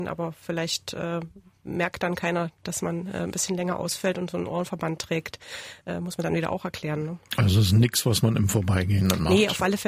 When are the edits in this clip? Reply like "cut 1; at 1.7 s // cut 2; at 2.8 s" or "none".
none

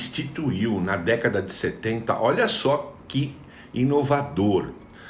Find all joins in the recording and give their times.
none

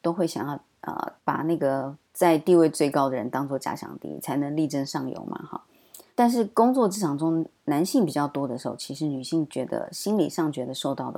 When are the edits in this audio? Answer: cut 1; at 1.2 s // cut 2; at 2.0 s // cut 3; at 6.1 s

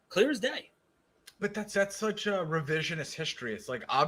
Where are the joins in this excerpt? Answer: cut 1; at 1.4 s // cut 2; at 1.7 s

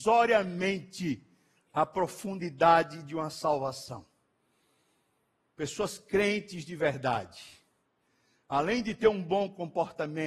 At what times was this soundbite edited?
none

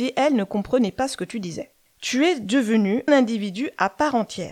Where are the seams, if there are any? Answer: cut 1; at 3.1 s

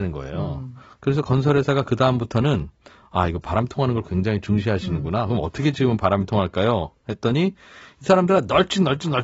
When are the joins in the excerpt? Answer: none

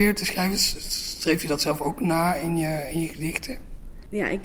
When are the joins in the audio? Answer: none

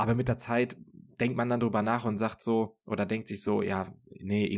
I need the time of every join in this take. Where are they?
none

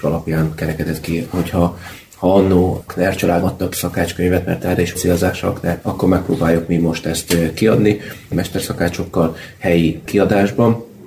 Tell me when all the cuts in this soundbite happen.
cut 1; at 2.9 s // cut 2; at 3.4 s // cut 3; at 3.7 s // cut 4; at 4.9 s // cut 5; at 5.8 s // cut 6; at 8.3 s

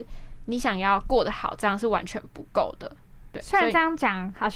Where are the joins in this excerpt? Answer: cut 1; at 3.3 s

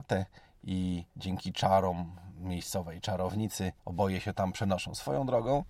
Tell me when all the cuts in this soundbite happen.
cut 1; at 1.1 s // cut 2; at 3.8 s

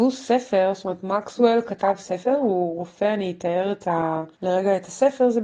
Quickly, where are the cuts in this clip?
cut 1; at 4.3 s

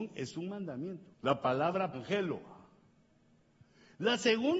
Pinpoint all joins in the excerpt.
cut 1; at 1.1 s // cut 2; at 1.9 s

